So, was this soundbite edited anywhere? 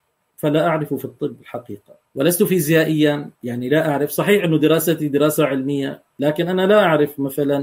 yes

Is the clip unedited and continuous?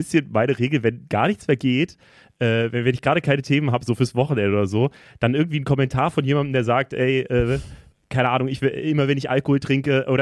yes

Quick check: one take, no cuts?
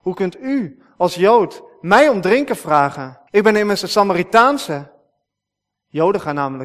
no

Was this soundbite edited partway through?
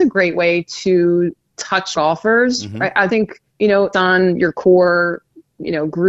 yes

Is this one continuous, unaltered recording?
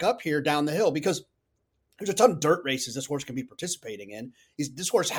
yes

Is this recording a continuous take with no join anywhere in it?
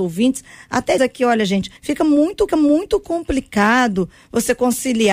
no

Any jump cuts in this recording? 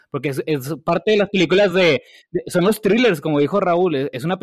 no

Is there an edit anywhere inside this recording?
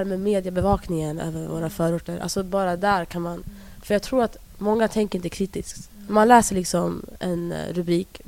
no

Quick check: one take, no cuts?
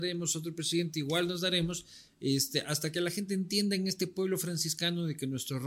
yes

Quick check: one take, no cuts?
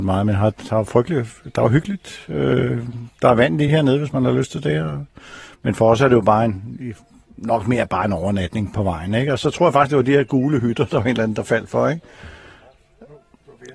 yes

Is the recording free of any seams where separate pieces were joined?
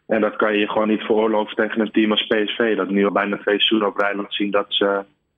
no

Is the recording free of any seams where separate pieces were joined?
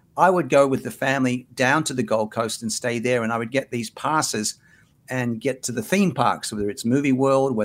yes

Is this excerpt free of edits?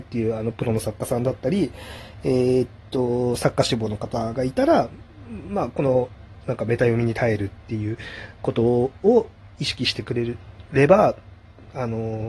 no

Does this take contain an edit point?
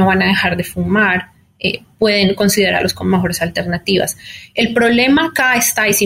no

